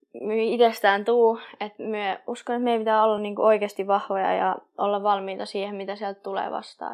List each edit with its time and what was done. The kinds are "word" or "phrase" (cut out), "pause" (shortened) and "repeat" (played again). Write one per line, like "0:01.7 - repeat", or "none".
none